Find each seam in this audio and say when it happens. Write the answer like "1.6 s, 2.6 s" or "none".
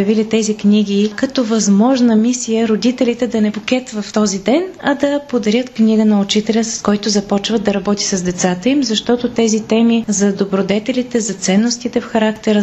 3.5 s